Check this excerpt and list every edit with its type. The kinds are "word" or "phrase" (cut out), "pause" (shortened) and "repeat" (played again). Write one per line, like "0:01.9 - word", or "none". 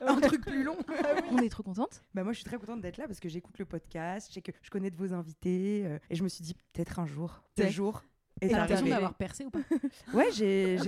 0:04.6 - pause
0:06.0 - pause
0:07.6 - phrase